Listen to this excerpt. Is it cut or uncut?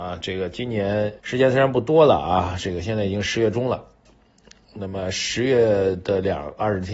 cut